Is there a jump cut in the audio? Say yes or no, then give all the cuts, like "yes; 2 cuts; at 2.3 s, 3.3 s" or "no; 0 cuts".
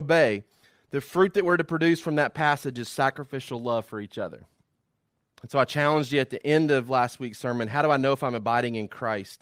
no; 0 cuts